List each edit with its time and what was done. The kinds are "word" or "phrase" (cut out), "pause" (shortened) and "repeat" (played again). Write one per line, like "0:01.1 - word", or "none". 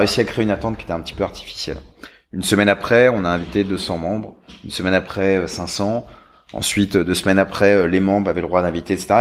none